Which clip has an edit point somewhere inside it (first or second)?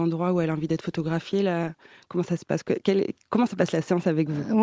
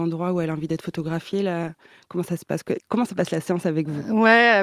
second